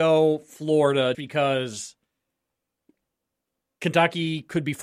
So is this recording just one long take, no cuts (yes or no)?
no